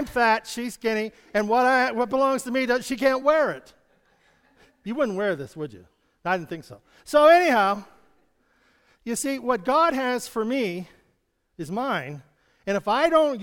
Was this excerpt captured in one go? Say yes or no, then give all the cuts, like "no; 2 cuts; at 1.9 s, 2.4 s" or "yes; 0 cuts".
yes; 0 cuts